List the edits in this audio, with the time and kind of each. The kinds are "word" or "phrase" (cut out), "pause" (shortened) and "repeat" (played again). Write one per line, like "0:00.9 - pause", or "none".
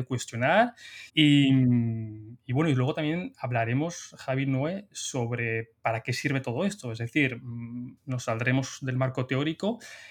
0:01.1 - pause
0:08.0 - pause